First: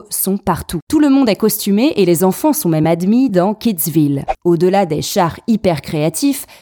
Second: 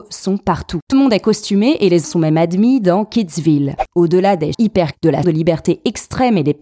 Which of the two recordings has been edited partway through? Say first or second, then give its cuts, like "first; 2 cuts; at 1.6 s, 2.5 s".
second; 5 cuts; at 0.9 s, 2.0 s, 4.5 s, 4.9 s, 5.2 s